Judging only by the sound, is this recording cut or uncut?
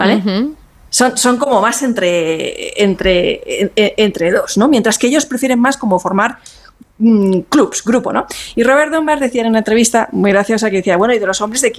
uncut